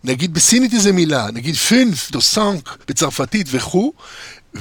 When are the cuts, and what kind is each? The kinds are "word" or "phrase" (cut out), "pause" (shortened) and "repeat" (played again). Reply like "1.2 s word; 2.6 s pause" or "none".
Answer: 2.1 s word; 2.8 s pause

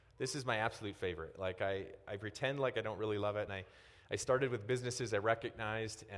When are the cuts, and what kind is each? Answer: 3.5 s phrase

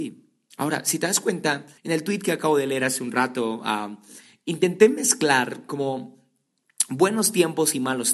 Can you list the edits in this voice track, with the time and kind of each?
1.8 s pause

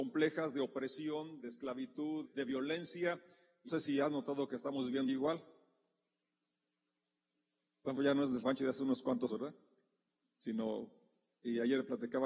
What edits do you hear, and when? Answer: 1.4 s word; 2.2 s word; 3.7 s word; 5.1 s word; 8.0 s word; 8.4 s word; 9.3 s word

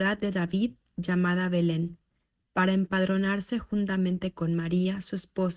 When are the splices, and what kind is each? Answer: none

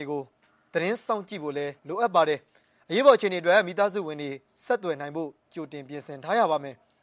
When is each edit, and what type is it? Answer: 1.8 s pause

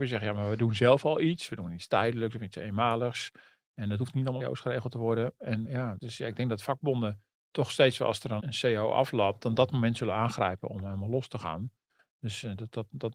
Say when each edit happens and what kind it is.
4.4 s word; 5.6 s word; 6.0 s word; 8.4 s word

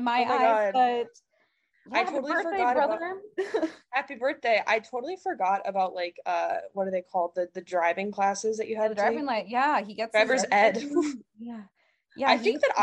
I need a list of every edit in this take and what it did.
none

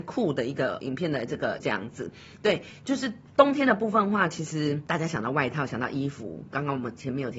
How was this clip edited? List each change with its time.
1.6 s word

